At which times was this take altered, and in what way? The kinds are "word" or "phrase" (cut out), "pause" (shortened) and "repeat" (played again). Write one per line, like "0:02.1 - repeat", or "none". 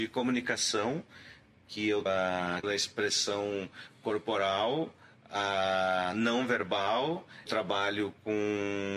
0:02.1 - word
0:02.6 - word
0:07.5 - word

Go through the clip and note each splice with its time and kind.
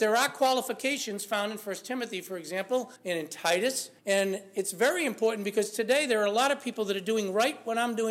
0:03.0 - pause
0:04.0 - pause

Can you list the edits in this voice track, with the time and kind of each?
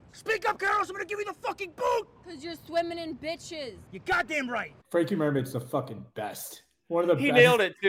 0:03.9 - pause
0:04.8 - pause

